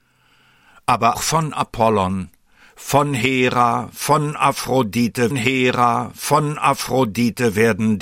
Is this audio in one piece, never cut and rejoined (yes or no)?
no